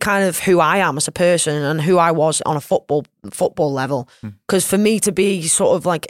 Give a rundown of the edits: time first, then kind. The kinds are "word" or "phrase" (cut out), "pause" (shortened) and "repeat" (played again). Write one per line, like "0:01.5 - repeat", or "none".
none